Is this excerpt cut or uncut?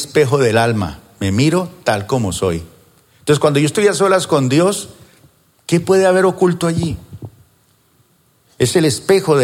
uncut